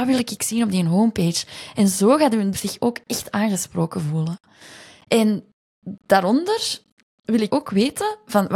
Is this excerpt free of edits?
no; 2 cuts; at 2.5 s, 7.5 s

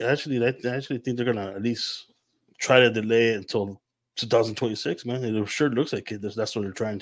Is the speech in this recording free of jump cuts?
yes; 0 cuts

